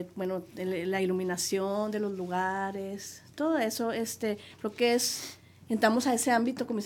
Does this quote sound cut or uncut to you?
uncut